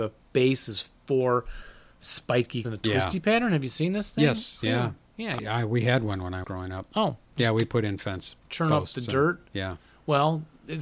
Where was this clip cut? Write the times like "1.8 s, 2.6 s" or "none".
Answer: 2.6 s, 5.4 s, 6.4 s